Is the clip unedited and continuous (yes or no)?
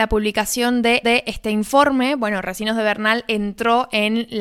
no